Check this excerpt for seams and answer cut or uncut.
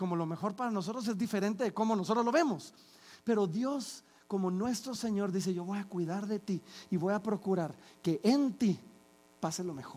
uncut